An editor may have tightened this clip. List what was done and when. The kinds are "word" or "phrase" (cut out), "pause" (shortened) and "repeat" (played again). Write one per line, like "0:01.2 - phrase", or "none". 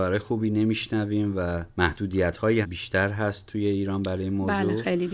0:01.7 - pause
0:02.6 - word